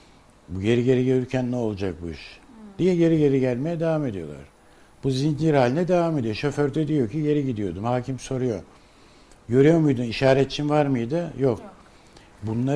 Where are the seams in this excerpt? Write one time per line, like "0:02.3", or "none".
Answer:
none